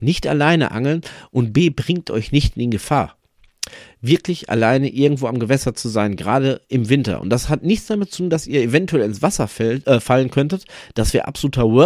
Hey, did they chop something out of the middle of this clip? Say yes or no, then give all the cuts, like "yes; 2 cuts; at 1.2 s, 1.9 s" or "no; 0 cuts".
no; 0 cuts